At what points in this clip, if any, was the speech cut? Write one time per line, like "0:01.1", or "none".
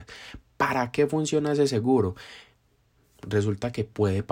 none